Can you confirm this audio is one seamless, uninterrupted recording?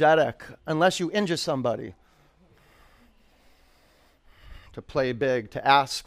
no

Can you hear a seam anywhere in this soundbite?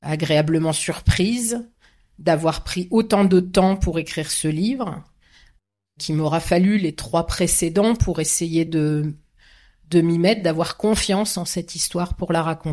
no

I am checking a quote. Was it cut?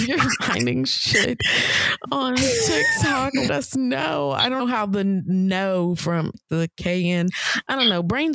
yes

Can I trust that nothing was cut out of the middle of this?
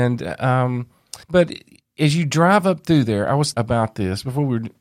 no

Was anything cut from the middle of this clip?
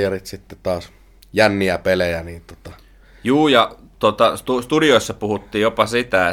no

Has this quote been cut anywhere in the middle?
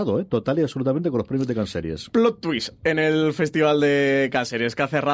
no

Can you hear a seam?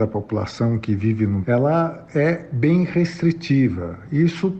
yes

